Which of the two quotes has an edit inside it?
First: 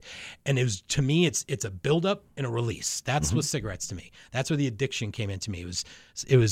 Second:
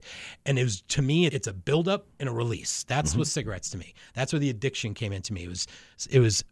second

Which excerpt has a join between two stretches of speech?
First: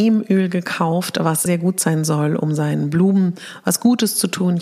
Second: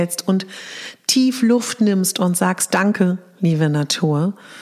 first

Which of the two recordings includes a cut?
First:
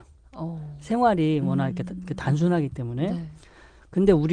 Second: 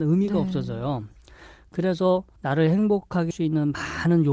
second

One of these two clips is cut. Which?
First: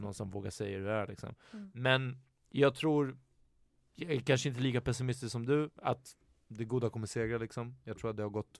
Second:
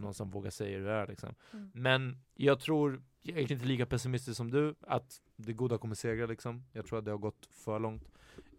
second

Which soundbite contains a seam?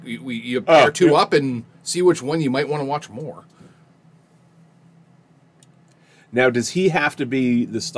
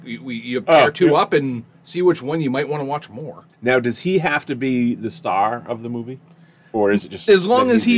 second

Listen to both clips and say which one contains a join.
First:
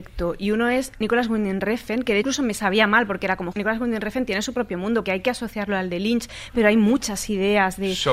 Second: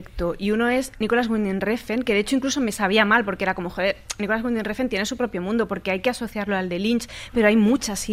first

